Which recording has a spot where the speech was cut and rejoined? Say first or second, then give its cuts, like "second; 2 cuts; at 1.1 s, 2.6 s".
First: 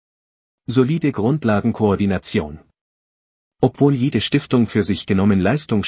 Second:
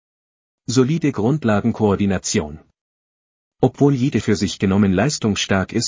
second; 1 cut; at 4.2 s